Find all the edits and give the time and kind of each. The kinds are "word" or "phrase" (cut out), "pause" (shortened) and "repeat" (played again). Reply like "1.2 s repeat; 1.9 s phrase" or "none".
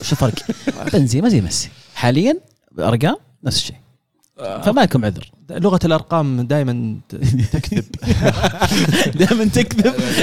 none